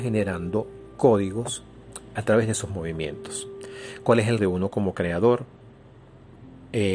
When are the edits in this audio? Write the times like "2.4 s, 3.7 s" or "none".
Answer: 2.2 s, 4.4 s